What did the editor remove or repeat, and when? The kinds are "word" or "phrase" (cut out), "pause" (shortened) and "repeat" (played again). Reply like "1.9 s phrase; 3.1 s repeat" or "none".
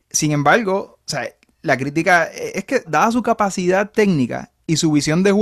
2.9 s word